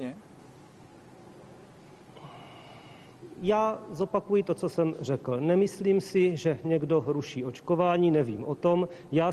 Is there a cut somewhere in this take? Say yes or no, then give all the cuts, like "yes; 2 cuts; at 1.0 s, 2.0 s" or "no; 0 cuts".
no; 0 cuts